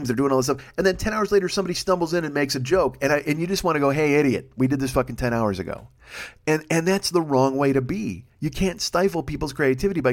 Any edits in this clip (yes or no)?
yes